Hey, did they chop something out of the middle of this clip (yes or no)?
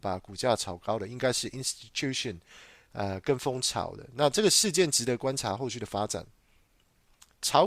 no